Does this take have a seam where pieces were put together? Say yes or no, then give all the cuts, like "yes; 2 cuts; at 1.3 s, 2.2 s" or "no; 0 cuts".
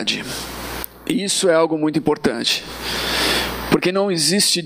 no; 0 cuts